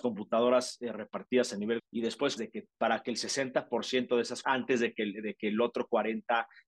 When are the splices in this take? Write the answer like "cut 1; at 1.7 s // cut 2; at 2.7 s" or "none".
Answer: cut 1; at 1.8 s // cut 2; at 2.4 s // cut 3; at 2.7 s // cut 4; at 4.4 s

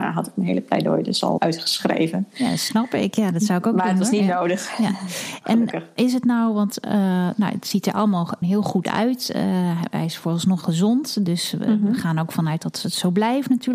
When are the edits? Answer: cut 1; at 1.4 s // cut 2; at 8.4 s // cut 3; at 10.6 s

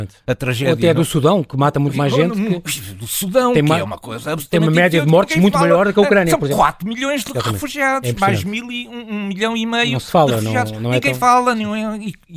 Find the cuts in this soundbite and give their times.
none

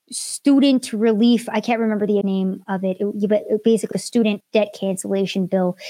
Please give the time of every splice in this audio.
cut 1; at 2.2 s // cut 2; at 2.6 s // cut 3; at 3.9 s // cut 4; at 4.4 s

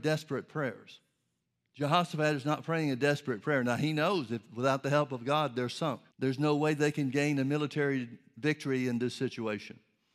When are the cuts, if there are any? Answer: cut 1; at 1.5 s // cut 2; at 6.1 s

